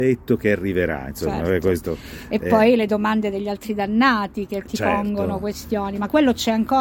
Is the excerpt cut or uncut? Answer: uncut